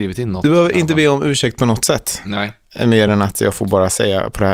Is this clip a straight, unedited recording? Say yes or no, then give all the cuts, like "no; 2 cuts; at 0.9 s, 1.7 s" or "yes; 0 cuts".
yes; 0 cuts